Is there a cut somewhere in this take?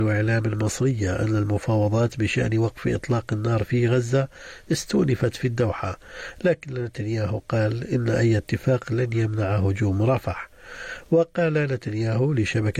no; 0 cuts

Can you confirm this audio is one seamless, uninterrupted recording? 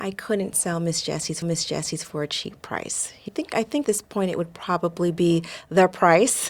no; 3 cuts; at 1.4 s, 3.3 s, 3.8 s

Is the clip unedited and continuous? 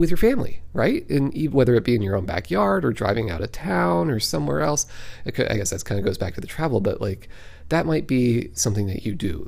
yes; 0 cuts

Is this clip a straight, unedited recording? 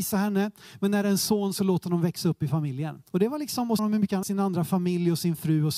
no; 3 cuts; at 3.1 s, 3.8 s, 4.2 s

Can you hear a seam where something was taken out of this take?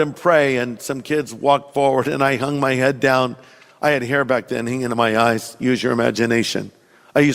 no; 0 cuts

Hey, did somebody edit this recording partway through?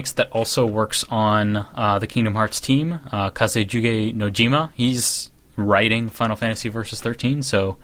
no; 0 cuts

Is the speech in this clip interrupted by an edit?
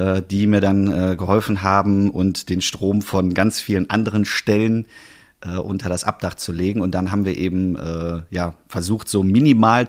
no; 0 cuts

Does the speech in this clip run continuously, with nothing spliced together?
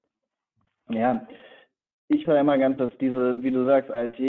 no; 2 cuts; at 2.2 s, 2.8 s

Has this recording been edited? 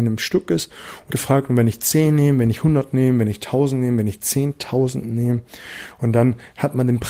yes; 1 cut; at 1.1 s

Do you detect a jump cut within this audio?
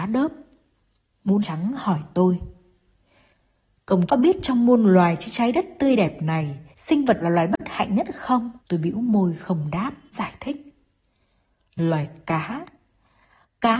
yes; 6 cuts; at 1.4 s, 4.1 s, 6.7 s, 7.2 s, 8.6 s, 10.1 s

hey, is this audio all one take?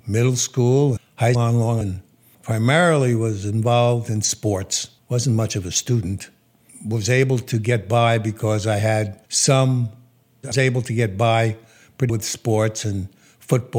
no; 7 cuts; at 1.0 s, 1.3 s, 1.8 s, 5.0 s, 9.3 s, 10.5 s, 12.1 s

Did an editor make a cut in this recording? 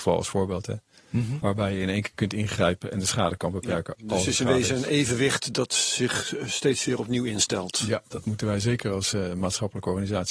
no; 0 cuts

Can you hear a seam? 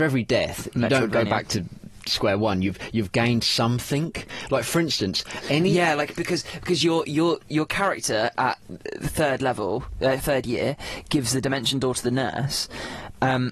no; 0 cuts

